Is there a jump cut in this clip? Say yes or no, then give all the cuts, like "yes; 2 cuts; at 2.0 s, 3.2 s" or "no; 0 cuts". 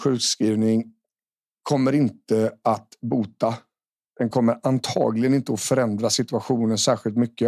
no; 0 cuts